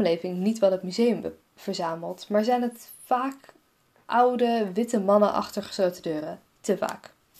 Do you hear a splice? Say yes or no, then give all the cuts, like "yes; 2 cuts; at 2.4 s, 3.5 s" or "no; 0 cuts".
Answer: no; 0 cuts